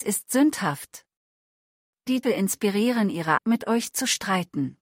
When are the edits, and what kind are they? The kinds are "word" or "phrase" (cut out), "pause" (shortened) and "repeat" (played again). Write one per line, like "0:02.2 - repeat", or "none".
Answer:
0:02.2 - word
0:03.4 - word